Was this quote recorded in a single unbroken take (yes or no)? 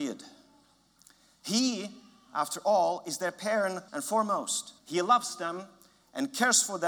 no